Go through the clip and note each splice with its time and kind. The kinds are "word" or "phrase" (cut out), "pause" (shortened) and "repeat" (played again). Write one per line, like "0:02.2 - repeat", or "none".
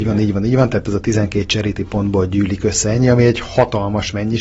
none

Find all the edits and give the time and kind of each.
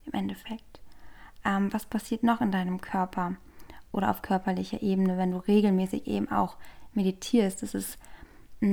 none

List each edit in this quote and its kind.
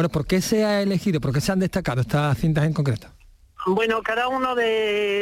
none

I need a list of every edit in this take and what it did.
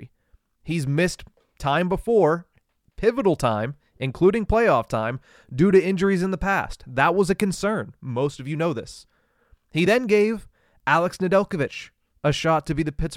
none

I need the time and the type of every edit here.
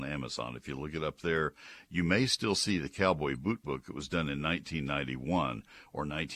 none

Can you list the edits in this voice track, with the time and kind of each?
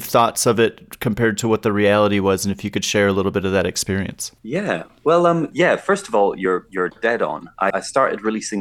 0:04.4 - pause
0:07.7 - word

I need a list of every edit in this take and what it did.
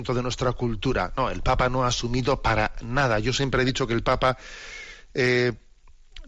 none

